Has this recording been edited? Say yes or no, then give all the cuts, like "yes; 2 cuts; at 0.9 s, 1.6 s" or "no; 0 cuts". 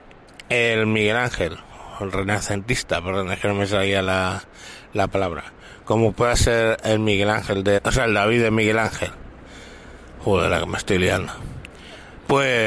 yes; 1 cut; at 7.8 s